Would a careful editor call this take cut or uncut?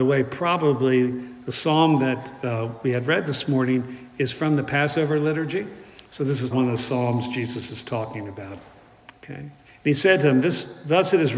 cut